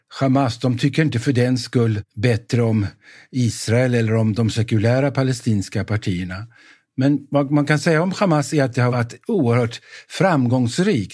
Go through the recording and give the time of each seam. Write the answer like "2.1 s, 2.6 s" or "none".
none

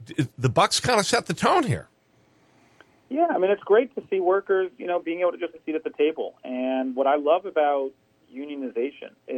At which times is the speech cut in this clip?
5.5 s

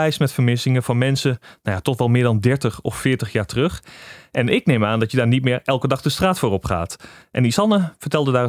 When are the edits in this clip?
none

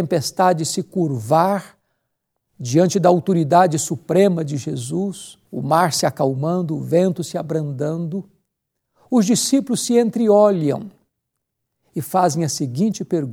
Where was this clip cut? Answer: 5.5 s

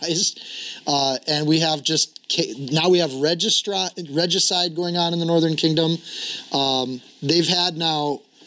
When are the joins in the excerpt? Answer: none

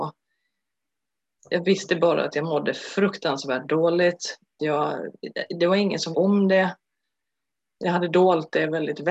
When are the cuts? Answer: 4.6 s, 6.1 s

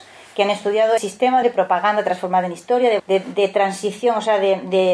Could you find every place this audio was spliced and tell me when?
1.0 s, 1.4 s, 3.0 s

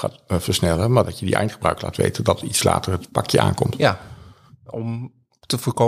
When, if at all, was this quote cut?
none

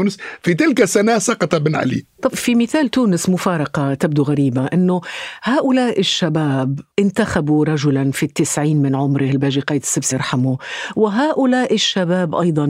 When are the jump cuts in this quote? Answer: 6.9 s, 10.1 s

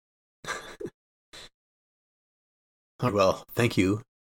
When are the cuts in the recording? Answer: 3.1 s

